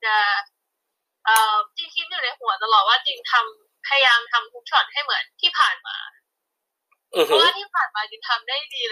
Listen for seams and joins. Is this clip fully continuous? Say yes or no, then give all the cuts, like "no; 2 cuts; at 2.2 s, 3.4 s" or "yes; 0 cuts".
no; 2 cuts; at 1.7 s, 5.3 s